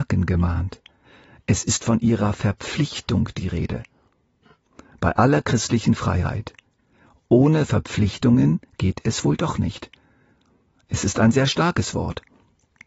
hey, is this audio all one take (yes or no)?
yes